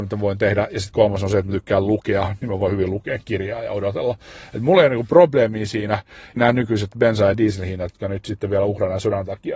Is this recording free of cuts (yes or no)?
no